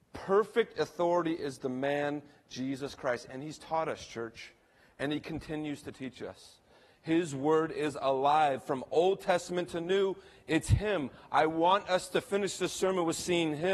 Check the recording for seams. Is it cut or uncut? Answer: uncut